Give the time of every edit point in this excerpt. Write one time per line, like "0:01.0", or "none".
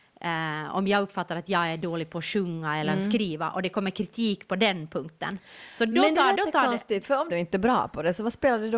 0:06.4
0:07.3